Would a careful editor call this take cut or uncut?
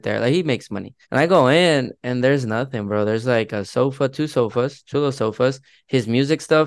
cut